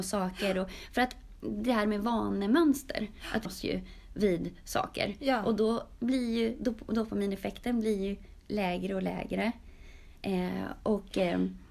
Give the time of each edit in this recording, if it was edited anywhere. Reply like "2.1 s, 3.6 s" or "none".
3.4 s